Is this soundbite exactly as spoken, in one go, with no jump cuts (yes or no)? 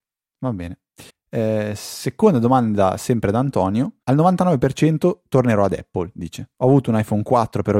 no